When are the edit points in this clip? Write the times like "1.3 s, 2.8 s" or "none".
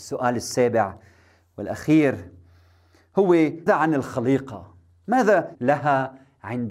3.7 s, 5.5 s